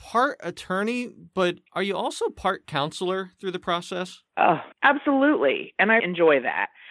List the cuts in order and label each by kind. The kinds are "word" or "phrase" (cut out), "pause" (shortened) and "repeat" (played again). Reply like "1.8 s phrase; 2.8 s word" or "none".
1.7 s pause; 4.7 s pause; 6.0 s word